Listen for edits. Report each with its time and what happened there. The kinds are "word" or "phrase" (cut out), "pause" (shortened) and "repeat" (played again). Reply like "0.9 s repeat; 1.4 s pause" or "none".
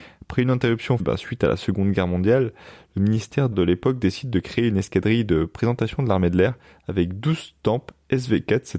1.0 s word; 3.5 s word